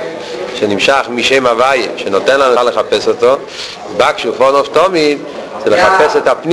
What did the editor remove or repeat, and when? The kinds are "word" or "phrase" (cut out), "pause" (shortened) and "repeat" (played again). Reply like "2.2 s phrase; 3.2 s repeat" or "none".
2.5 s phrase